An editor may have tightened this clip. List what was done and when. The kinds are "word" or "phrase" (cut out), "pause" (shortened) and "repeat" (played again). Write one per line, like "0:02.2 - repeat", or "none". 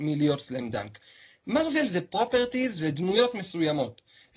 none